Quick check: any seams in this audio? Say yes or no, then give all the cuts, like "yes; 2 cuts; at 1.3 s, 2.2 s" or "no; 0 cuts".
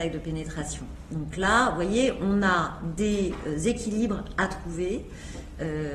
no; 0 cuts